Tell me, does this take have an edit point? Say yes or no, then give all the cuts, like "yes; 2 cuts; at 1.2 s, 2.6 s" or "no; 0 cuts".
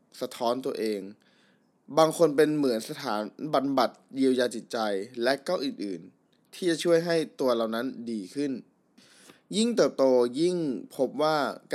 no; 0 cuts